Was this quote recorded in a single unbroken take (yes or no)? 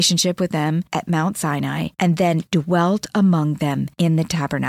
yes